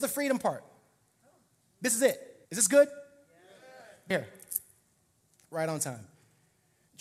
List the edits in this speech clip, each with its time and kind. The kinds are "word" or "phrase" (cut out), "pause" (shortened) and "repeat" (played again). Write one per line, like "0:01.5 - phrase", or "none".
0:02.4 - pause
0:04.1 - phrase